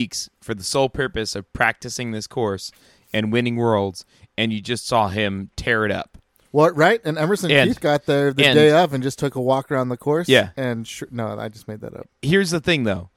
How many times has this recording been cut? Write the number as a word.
zero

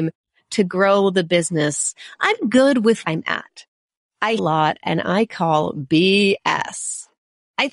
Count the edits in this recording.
two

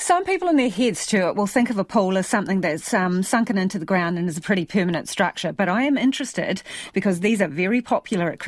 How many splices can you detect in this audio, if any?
zero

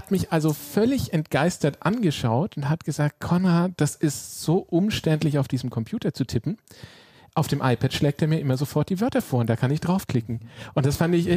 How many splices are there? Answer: zero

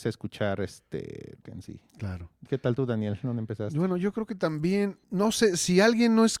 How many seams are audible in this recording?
two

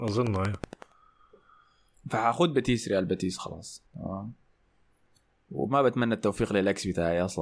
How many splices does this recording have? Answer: one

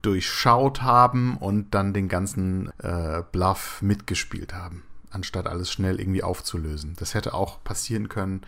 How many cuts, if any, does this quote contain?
one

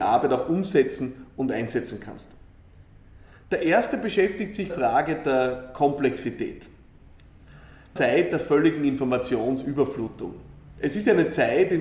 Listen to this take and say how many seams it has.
two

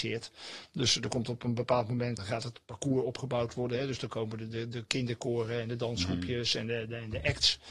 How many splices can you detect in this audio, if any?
one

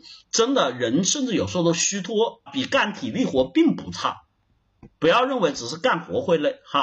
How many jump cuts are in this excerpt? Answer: one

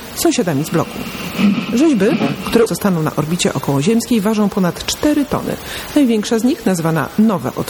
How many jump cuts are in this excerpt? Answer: one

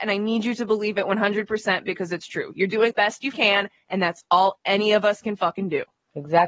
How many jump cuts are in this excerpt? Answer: two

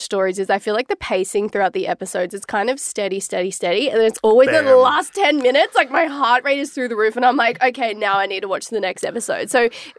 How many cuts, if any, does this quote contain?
zero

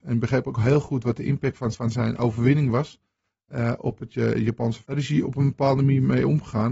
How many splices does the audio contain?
two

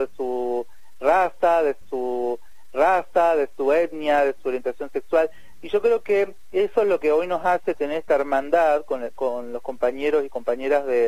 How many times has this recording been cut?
one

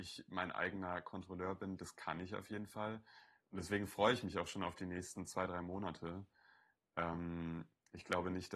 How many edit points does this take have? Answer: zero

